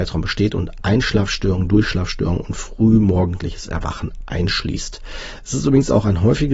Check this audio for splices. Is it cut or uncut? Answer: uncut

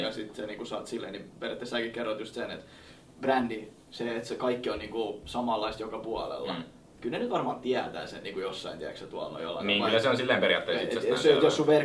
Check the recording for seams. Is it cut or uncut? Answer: uncut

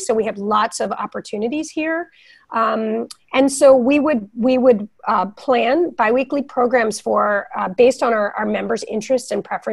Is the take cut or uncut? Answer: cut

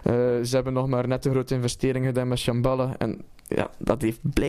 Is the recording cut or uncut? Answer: uncut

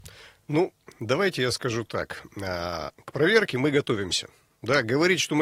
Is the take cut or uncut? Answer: uncut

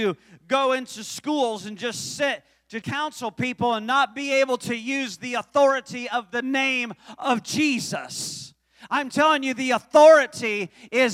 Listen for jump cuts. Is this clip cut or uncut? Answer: cut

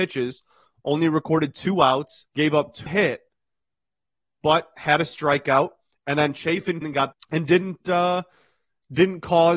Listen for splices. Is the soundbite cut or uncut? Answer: cut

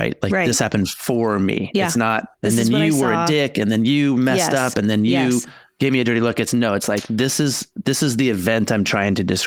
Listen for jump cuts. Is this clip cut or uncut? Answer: cut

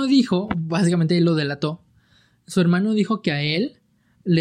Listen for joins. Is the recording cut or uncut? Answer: uncut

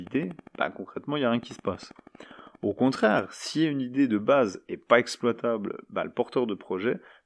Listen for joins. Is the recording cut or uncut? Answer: uncut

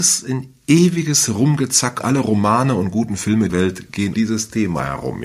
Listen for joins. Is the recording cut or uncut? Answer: cut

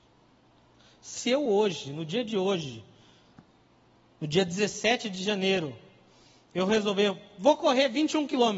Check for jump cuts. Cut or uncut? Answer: uncut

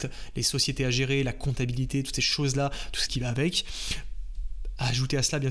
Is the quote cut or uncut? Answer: cut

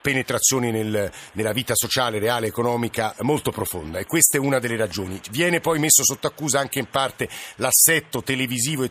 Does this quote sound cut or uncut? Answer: uncut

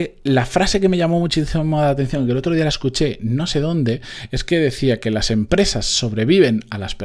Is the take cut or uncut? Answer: uncut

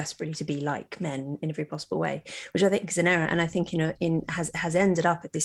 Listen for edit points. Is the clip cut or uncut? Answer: uncut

